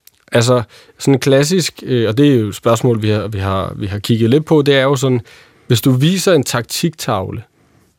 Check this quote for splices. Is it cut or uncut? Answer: uncut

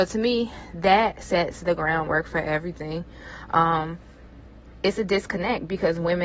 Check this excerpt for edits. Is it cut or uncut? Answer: uncut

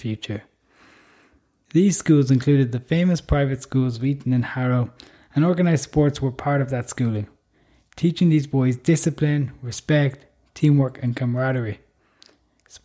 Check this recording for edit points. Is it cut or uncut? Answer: uncut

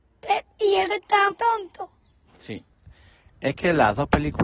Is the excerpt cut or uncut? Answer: cut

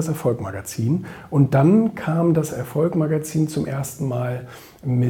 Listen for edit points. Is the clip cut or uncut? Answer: uncut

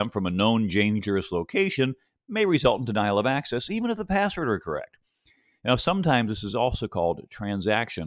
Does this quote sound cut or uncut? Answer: uncut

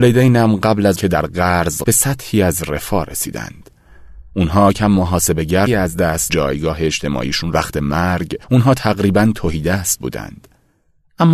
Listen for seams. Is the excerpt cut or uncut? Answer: cut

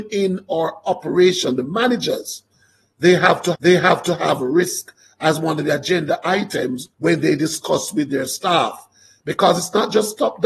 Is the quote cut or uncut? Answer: cut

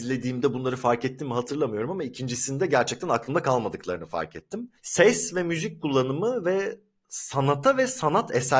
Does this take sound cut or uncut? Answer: uncut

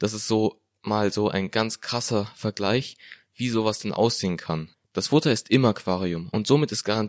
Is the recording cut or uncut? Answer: uncut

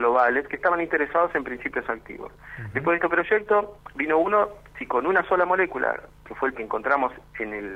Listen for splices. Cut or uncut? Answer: cut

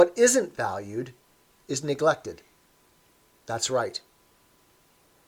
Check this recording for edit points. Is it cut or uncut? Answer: uncut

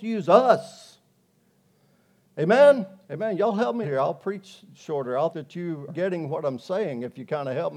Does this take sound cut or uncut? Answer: cut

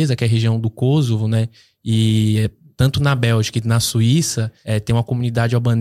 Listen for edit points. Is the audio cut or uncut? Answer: uncut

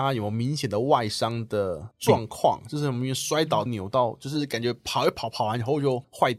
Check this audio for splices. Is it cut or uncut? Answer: cut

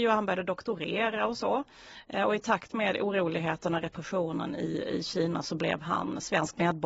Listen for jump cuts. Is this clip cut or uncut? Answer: uncut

